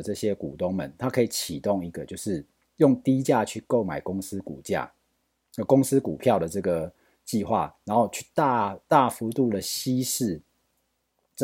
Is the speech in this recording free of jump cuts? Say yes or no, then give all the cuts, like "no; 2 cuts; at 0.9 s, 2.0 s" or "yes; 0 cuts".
yes; 0 cuts